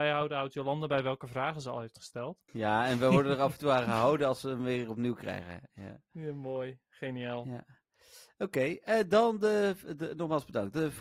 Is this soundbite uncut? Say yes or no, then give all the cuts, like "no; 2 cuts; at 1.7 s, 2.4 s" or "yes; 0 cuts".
no; 1 cut; at 2.5 s